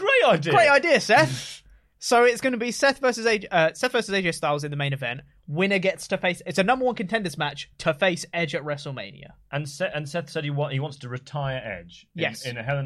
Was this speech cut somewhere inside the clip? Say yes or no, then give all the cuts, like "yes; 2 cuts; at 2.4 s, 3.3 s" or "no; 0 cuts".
no; 0 cuts